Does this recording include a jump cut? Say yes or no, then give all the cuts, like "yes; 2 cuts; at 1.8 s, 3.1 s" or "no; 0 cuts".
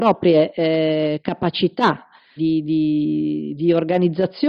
yes; 1 cut; at 2.4 s